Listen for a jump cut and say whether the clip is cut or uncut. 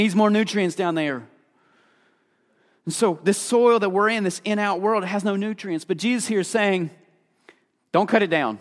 uncut